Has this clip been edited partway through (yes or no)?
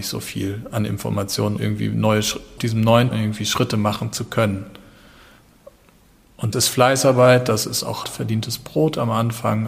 yes